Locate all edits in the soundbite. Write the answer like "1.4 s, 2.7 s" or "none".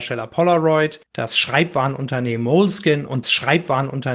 3.2 s